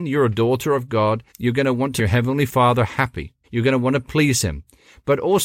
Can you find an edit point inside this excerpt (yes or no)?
yes